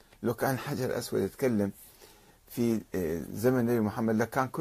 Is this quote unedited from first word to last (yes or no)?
yes